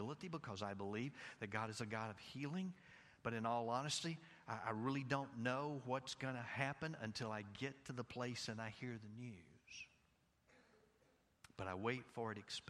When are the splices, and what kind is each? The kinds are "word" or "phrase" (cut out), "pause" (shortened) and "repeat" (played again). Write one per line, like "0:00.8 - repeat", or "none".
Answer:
none